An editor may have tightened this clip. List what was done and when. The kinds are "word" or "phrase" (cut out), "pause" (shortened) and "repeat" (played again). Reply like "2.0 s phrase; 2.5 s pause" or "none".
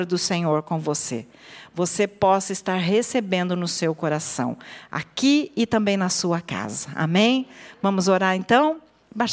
none